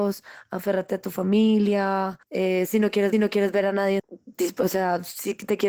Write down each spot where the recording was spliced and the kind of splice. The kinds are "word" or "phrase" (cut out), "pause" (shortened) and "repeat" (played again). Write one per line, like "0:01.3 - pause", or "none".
0:02.2 - pause
0:03.1 - repeat
0:04.0 - phrase